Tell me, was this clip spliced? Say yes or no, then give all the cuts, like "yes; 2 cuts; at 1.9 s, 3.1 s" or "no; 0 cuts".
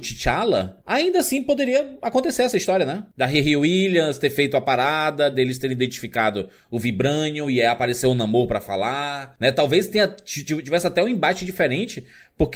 no; 0 cuts